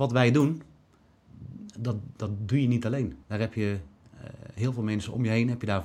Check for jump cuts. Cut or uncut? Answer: cut